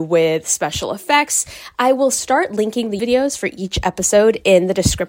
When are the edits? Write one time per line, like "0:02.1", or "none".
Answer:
0:03.0

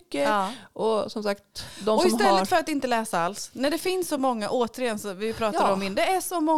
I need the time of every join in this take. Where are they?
none

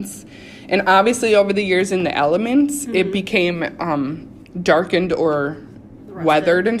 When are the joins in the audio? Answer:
none

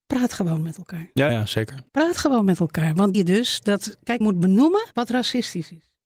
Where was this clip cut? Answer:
0:01.3
0:01.9
0:03.1
0:04.2
0:04.9

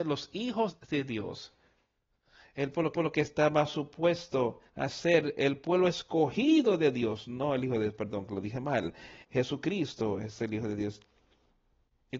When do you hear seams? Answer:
0:02.9
0:04.7
0:09.2

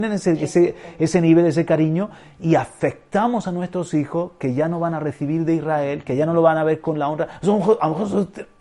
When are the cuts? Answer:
none

